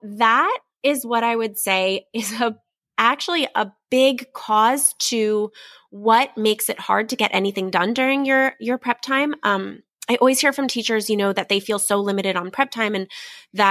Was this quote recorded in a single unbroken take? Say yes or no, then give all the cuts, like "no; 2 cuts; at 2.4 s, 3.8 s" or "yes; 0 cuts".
yes; 0 cuts